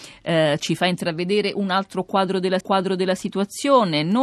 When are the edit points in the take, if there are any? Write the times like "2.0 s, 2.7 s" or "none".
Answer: 2.6 s

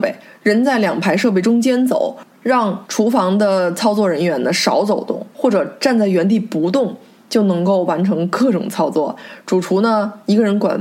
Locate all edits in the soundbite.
5.3 s

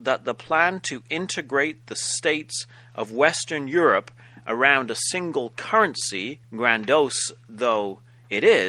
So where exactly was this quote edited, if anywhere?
6.4 s

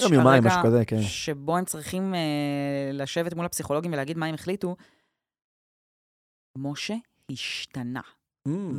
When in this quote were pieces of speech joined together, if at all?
none

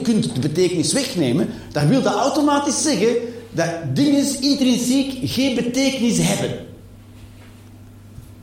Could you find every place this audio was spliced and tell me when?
none

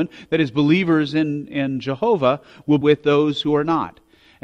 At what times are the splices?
2.8 s

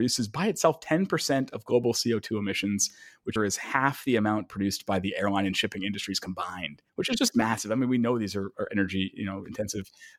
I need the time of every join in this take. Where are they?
3.4 s, 6.9 s

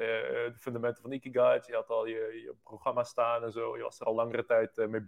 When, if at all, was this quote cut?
none

